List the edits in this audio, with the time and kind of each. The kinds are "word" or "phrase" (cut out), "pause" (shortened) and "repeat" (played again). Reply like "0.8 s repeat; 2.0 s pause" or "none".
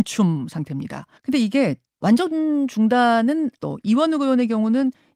1.2 s pause; 2.0 s word; 3.6 s word